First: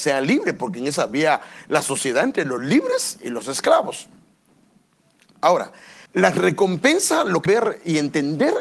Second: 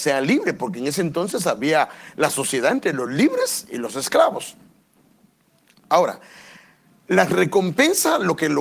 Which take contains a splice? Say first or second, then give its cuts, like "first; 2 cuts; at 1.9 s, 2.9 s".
first; 3 cuts; at 1.0 s, 6.1 s, 7.5 s